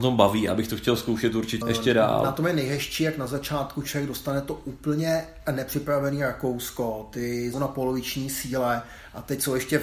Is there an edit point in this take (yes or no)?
yes